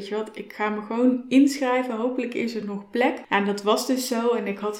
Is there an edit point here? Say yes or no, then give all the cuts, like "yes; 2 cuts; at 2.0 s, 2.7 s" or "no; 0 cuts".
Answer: no; 0 cuts